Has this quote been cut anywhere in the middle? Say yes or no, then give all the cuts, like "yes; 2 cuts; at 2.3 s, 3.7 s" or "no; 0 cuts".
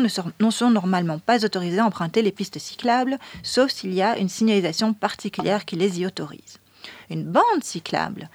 no; 0 cuts